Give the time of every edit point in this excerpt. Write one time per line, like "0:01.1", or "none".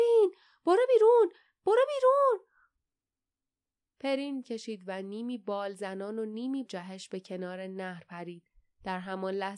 0:04.4
0:06.6